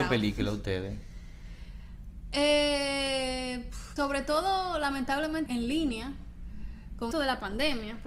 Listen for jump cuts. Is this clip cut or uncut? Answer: cut